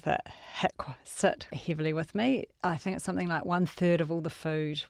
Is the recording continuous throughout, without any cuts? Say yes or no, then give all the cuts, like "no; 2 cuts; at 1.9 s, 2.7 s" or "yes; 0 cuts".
no; 1 cut; at 1.5 s